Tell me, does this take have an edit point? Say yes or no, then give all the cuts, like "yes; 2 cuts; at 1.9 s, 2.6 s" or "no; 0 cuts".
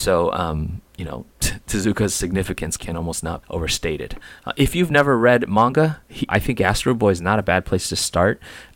yes; 4 cuts; at 1.3 s, 2.8 s, 3.4 s, 6.3 s